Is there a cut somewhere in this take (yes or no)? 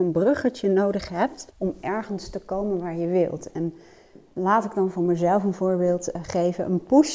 yes